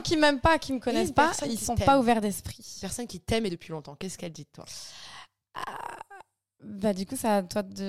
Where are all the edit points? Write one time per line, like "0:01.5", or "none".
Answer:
0:03.5